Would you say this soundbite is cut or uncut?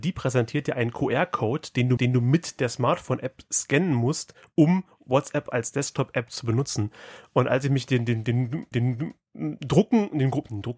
cut